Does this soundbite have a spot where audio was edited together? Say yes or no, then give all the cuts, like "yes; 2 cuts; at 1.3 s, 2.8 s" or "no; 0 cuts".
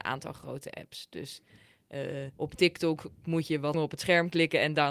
yes; 2 cuts; at 2.3 s, 3.7 s